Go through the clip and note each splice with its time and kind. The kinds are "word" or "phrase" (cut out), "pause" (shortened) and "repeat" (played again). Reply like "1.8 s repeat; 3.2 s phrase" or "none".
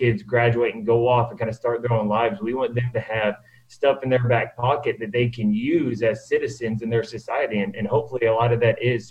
none